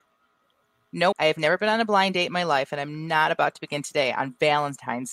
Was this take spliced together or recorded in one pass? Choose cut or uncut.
cut